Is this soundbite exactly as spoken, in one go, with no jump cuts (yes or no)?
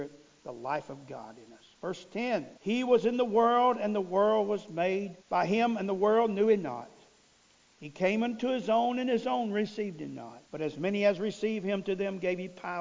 no